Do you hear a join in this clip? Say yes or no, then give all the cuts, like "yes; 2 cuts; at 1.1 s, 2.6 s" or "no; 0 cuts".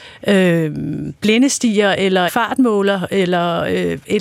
yes; 2 cuts; at 1.2 s, 2.3 s